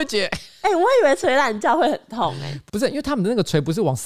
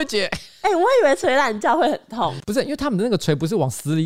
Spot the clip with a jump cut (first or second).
second